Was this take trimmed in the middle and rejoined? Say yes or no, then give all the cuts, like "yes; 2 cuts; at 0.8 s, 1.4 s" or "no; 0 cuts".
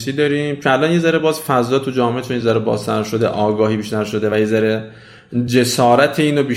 no; 0 cuts